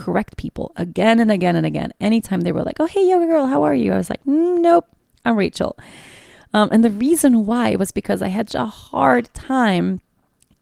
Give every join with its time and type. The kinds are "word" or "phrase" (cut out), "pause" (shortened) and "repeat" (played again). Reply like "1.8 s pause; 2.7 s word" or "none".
8.5 s word

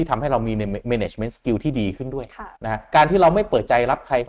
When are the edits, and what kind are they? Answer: 2.6 s pause

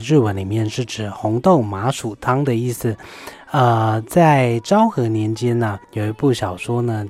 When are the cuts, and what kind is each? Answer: 5.8 s pause

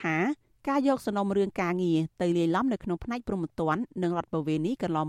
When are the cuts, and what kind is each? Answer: none

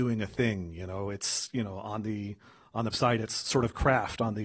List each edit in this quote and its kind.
2.9 s word

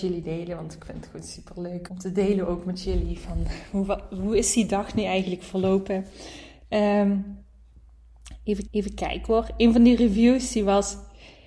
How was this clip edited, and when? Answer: 1.9 s word; 8.7 s repeat

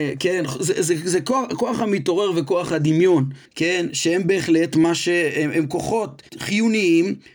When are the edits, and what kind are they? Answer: 3.5 s pause; 6.3 s pause

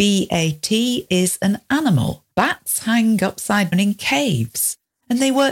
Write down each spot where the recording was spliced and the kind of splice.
1.1 s word; 2.3 s pause; 3.7 s word

